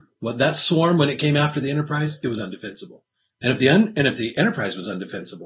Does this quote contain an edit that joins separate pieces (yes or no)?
no